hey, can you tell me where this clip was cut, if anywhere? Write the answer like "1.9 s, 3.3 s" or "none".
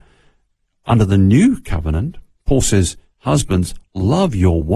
none

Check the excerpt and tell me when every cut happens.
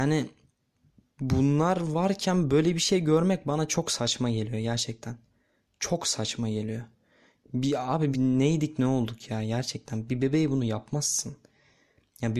8.1 s

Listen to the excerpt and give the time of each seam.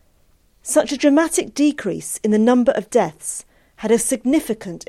none

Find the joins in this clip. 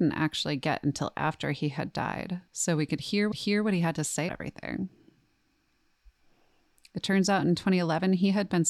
2.5 s, 3.3 s, 4.3 s

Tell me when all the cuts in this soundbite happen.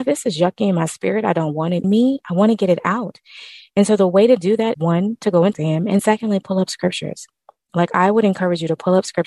1.8 s, 4.7 s, 5.5 s, 6.0 s

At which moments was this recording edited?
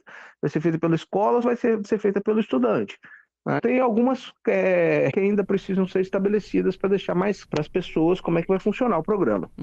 1.4 s, 1.8 s, 3.6 s, 5.1 s, 7.4 s

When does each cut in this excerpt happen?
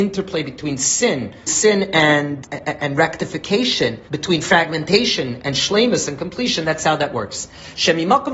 1.5 s, 2.4 s, 4.1 s

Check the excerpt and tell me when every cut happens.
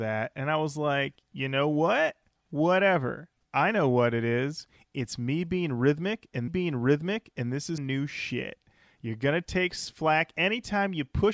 6.5 s, 7.8 s

